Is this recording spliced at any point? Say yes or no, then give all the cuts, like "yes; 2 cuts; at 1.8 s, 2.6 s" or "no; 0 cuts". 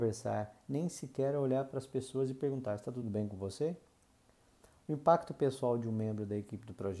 no; 0 cuts